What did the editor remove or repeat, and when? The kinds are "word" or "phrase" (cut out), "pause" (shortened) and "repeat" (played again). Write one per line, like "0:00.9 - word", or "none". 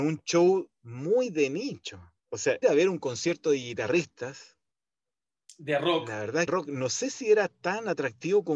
0:02.2 - pause
0:02.6 - word
0:06.5 - phrase